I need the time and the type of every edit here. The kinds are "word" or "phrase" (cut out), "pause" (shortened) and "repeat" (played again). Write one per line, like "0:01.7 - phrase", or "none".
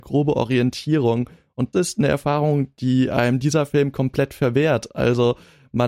0:01.7 - word